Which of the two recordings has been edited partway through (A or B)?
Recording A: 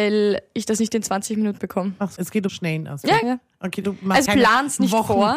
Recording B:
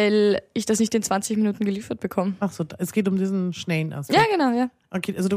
A